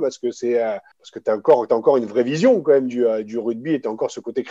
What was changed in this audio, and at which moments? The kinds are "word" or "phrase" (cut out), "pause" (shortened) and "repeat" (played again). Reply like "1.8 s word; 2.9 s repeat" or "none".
0.9 s pause